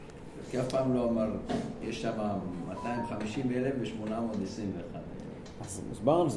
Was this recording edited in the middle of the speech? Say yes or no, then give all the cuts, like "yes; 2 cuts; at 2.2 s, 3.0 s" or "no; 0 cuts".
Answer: no; 0 cuts